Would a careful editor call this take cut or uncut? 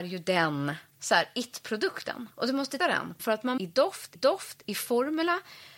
cut